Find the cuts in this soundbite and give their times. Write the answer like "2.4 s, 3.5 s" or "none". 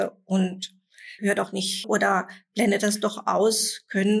1.2 s, 1.8 s